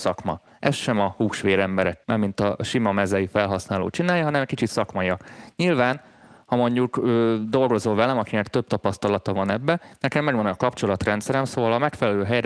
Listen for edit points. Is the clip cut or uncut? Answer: cut